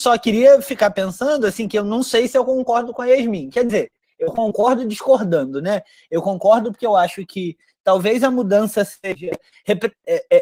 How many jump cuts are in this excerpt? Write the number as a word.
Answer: zero